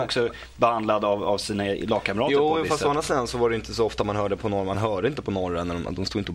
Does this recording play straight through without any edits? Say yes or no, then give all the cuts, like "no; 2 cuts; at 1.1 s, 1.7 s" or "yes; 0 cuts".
yes; 0 cuts